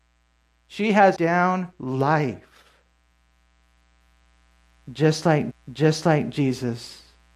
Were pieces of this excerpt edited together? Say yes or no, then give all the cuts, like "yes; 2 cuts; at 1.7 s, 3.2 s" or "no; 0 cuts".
yes; 3 cuts; at 1.2 s, 1.7 s, 5.5 s